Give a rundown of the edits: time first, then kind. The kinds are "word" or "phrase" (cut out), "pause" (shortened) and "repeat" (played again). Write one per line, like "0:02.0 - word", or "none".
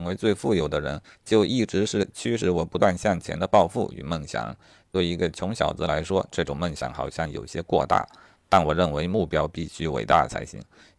none